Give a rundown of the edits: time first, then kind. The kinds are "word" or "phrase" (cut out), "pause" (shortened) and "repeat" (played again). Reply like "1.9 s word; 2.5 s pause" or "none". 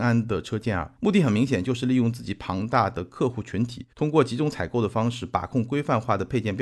1.0 s pause; 3.9 s pause

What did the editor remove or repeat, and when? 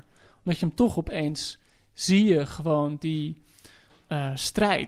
none

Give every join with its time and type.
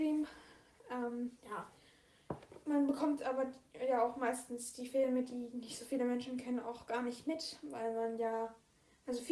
1.4 s pause

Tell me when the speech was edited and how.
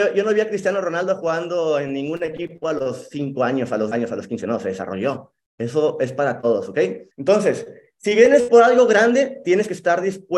7.1 s pause

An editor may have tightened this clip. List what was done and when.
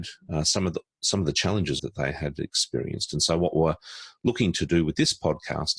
1.8 s word

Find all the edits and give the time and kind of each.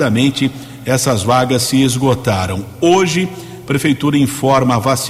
none

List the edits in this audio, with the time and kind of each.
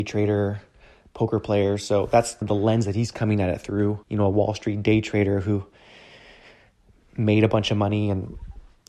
2.4 s word; 4.0 s pause

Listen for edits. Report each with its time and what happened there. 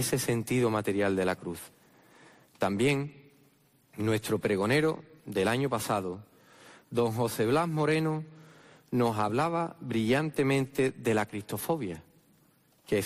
none

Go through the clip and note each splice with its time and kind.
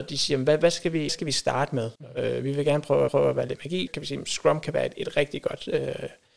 1.1 s word; 2.0 s pause; 3.1 s repeat; 3.9 s word

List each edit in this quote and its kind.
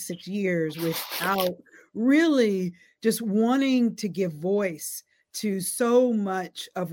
none

